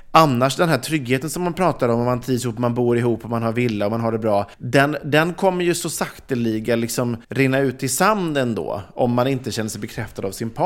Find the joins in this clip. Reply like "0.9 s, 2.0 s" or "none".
4.5 s, 7.2 s